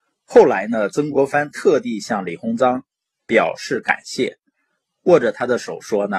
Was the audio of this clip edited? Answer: no; 0 cuts

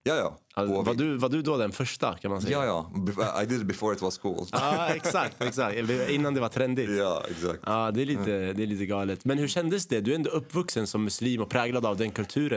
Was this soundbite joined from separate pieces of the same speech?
no; 0 cuts

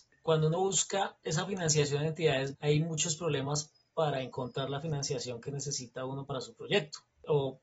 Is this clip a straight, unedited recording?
no; 1 cut; at 2.5 s

